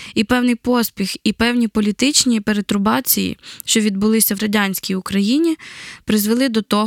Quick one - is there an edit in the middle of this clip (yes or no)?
yes